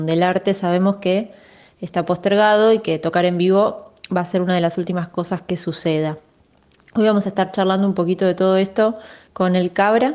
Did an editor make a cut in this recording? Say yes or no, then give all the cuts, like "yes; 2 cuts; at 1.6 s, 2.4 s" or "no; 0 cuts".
no; 0 cuts